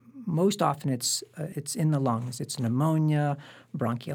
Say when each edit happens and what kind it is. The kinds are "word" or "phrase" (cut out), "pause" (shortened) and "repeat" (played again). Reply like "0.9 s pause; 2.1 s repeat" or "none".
1.5 s word